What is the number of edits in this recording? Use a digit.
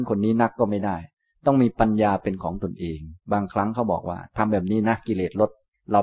1